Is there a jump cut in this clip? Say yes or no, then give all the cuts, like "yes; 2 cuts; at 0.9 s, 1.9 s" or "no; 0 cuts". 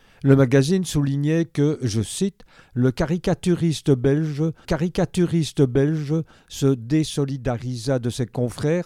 yes; 1 cut; at 4.6 s